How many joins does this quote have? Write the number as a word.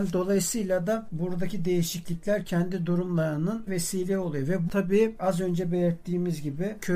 three